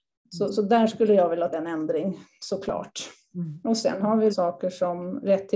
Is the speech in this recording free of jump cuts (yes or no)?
no